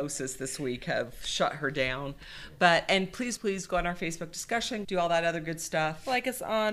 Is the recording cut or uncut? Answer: cut